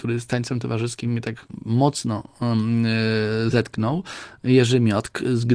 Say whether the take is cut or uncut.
uncut